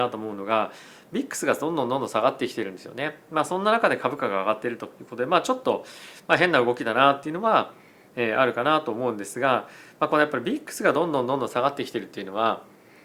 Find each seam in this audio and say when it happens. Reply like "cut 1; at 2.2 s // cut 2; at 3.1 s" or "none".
none